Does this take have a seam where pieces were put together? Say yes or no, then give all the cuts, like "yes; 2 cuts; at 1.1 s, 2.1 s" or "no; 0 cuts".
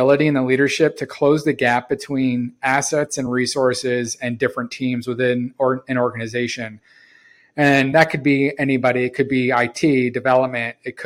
no; 0 cuts